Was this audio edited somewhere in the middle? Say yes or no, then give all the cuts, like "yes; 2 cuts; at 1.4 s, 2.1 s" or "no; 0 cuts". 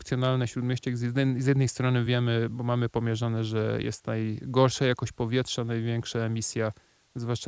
no; 0 cuts